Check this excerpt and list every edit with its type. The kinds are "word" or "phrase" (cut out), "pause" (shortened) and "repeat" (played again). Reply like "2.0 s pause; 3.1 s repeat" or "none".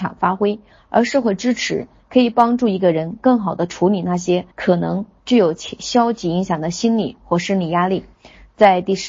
4.5 s pause